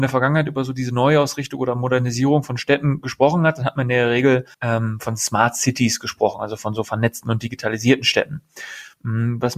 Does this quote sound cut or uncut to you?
cut